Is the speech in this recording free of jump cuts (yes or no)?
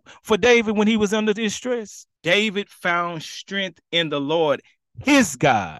no